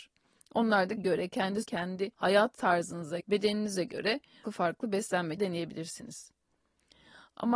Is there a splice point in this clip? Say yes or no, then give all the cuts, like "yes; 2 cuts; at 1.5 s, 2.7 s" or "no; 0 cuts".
yes; 6 cuts; at 1.0 s, 1.6 s, 2.1 s, 3.2 s, 4.4 s, 5.4 s